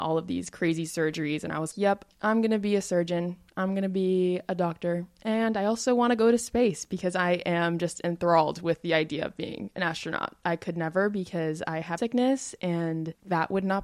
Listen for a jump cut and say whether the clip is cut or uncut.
cut